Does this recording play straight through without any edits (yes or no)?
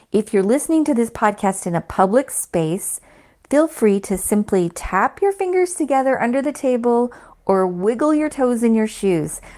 yes